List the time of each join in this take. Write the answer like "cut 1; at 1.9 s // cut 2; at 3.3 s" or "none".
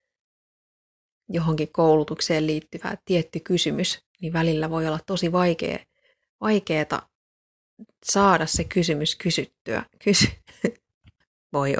cut 1; at 4.1 s